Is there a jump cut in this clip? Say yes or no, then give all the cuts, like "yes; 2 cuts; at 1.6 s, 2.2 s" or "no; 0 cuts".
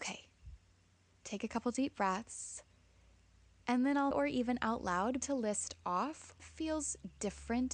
yes; 3 cuts; at 4.1 s, 5.2 s, 6.4 s